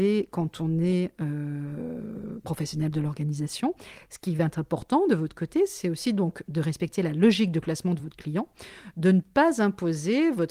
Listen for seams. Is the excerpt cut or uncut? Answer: uncut